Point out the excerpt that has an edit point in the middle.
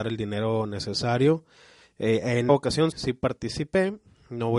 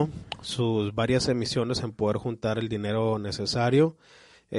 first; 2 cuts; at 2.5 s, 2.9 s

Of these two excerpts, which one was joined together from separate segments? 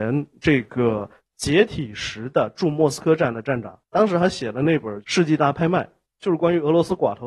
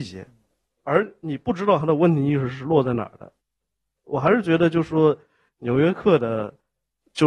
first; 1 cut; at 3.8 s

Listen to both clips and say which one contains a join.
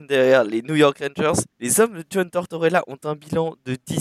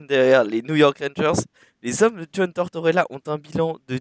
first; 1 cut; at 1.5 s

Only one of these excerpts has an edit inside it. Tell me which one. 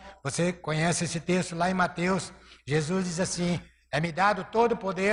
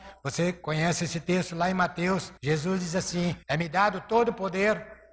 second; 2 cuts; at 2.4 s, 3.4 s

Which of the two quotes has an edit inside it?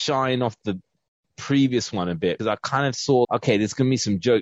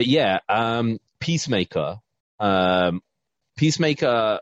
first; 2 cuts; at 2.4 s, 3.2 s

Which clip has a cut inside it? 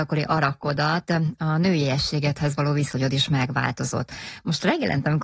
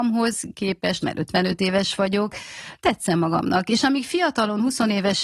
second; 2 cuts; at 1.0 s, 2.8 s

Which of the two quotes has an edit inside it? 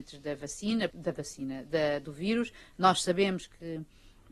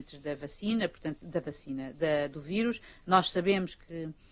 first; 1 cut; at 0.9 s

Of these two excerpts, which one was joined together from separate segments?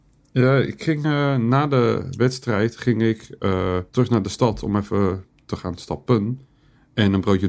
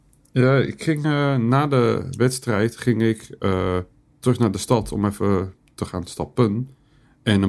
first; 1 cut; at 3.9 s

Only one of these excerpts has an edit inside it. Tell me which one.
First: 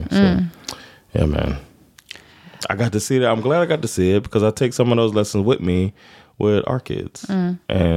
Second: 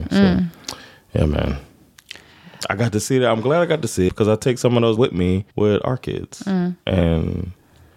second; 3 cuts; at 4.1 s, 5.0 s, 5.5 s

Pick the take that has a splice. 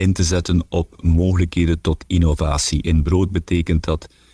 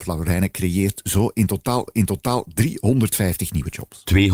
second; 1 cut; at 1.9 s

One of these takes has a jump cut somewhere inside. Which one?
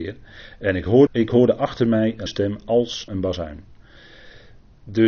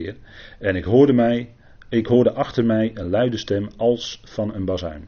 first; 3 cuts; at 1.1 s, 2.3 s, 3.1 s

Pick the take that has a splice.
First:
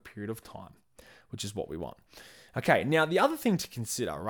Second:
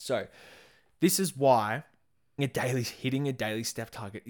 second; 1 cut; at 2.4 s

